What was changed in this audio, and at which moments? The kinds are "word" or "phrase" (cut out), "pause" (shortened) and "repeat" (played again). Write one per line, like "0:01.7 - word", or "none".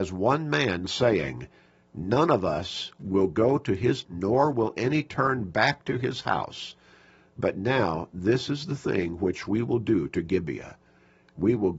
0:04.0 - word